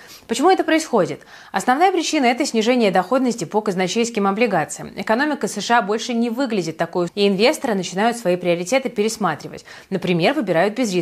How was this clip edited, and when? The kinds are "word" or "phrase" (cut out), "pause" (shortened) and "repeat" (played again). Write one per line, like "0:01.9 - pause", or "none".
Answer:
0:07.1 - word